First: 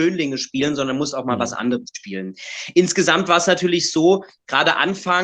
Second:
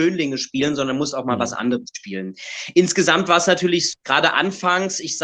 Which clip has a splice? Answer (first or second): second